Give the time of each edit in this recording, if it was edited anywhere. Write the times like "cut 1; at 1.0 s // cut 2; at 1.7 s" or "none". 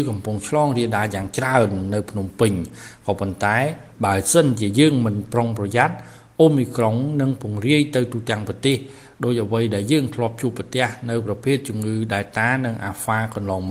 none